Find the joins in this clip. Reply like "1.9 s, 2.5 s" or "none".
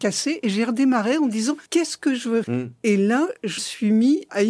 1.7 s, 2.4 s, 3.6 s